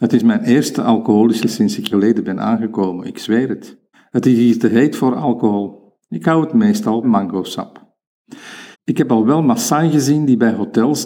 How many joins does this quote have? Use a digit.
5